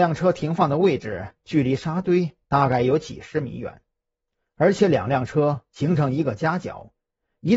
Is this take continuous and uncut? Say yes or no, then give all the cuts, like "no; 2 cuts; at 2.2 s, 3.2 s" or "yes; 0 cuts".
yes; 0 cuts